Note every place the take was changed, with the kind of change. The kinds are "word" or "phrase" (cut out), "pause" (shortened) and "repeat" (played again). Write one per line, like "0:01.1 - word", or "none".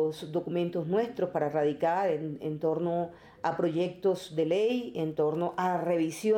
none